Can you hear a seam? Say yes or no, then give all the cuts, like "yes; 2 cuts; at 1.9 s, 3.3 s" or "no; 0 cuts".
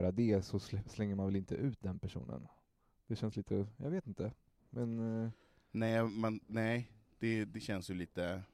no; 0 cuts